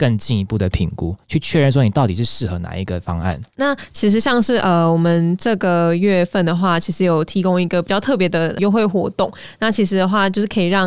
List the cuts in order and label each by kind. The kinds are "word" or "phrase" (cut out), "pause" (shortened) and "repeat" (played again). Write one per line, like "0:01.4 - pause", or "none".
0:01.2 - pause
0:03.5 - pause